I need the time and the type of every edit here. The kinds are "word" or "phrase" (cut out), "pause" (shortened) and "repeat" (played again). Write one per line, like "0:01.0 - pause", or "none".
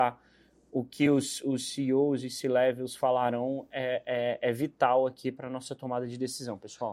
none